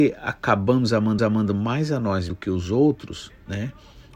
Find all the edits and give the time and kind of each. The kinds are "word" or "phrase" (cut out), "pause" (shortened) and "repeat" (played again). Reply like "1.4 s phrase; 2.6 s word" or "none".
1.2 s repeat; 2.3 s word

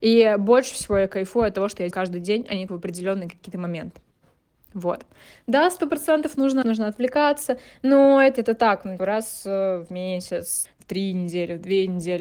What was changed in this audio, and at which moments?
1.9 s word; 2.7 s word; 6.6 s word; 8.4 s word; 9.0 s word; 10.6 s word

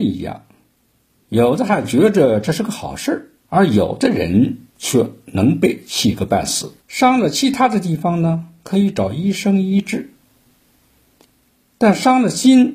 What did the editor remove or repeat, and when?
3.4 s pause; 4.7 s pause; 6.8 s pause

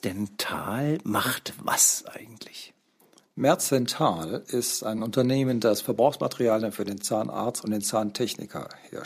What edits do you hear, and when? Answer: none

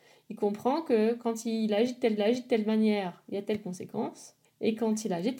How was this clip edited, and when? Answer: 2.2 s repeat; 4.4 s pause

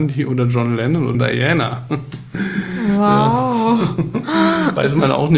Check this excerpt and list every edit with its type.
1.1 s phrase

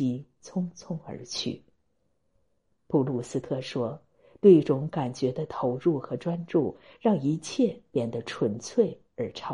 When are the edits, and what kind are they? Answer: none

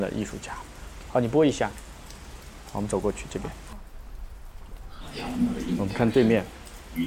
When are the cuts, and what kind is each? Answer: none

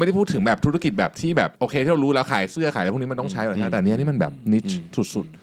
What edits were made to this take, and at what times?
1.6 s pause

